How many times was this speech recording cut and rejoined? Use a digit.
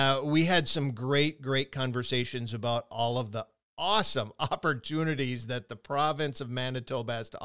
0